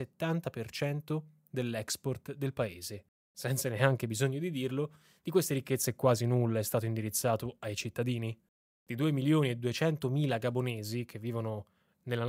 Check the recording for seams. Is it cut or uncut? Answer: uncut